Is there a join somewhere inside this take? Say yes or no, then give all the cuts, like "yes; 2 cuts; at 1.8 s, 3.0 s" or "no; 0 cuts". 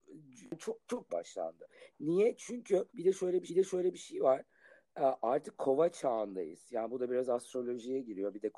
yes; 3 cuts; at 1.1 s, 2.9 s, 3.5 s